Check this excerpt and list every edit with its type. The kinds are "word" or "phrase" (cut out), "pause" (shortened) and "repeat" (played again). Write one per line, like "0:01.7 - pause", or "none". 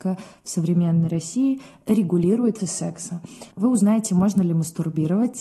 0:02.6 - word
0:03.5 - pause